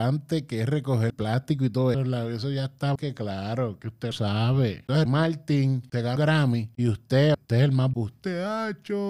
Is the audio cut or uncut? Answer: cut